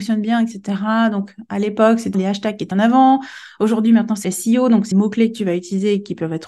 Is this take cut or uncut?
cut